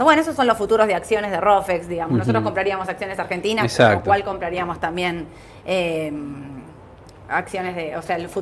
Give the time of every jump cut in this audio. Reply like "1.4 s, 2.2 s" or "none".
none

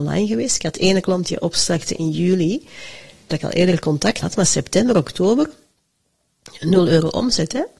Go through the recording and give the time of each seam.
3.3 s, 4.2 s

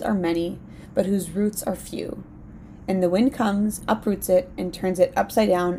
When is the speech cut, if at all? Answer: 3.8 s

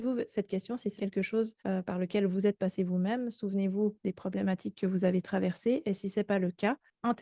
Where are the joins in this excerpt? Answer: 1.0 s, 1.6 s

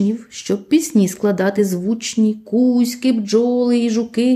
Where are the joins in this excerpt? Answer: none

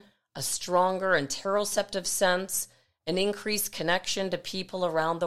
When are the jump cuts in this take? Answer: none

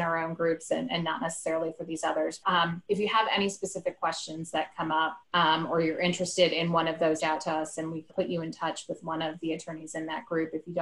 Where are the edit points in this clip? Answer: 2.4 s, 5.2 s, 7.2 s, 8.1 s

